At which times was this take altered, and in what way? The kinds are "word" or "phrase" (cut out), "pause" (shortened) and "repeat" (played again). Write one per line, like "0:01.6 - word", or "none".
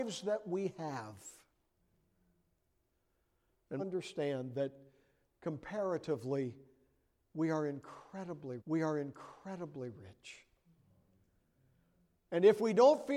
0:03.8 - phrase
0:08.6 - repeat